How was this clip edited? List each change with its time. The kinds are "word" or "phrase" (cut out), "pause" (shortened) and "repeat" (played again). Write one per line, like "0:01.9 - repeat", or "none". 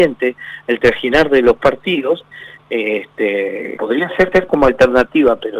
0:03.8 - word
0:04.3 - repeat